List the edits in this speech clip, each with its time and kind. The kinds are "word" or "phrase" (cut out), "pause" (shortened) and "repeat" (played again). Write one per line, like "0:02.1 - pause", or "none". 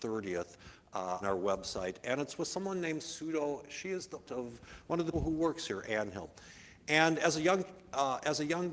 0:01.2 - word
0:03.0 - word
0:04.3 - word
0:05.1 - word